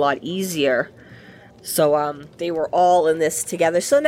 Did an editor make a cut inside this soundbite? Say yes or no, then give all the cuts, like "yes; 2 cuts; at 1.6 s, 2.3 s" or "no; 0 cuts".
no; 0 cuts